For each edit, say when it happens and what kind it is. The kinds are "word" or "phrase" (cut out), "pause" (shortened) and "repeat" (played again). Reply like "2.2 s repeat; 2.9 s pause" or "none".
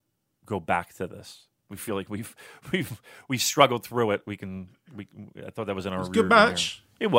none